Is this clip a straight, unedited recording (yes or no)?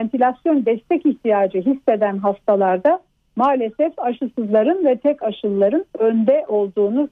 no